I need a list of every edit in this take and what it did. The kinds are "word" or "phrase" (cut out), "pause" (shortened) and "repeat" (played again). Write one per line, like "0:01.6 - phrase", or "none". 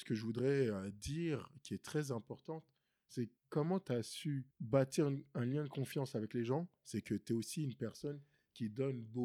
0:03.4 - pause
0:04.5 - pause